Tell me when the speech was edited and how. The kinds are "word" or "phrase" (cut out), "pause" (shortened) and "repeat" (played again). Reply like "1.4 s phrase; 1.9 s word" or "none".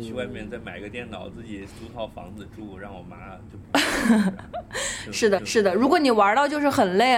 5.4 s repeat